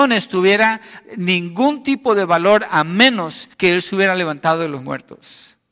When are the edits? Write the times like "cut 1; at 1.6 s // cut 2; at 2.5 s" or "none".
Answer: cut 1; at 3.5 s